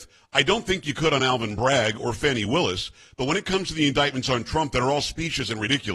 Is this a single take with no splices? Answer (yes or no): yes